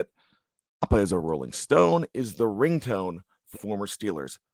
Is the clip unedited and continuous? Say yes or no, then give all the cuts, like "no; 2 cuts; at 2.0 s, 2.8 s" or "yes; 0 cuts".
no; 1 cut; at 3.5 s